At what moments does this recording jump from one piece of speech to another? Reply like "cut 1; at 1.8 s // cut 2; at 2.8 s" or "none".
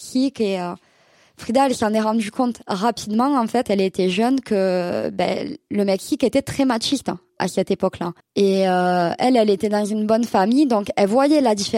cut 1; at 3.6 s // cut 2; at 8.2 s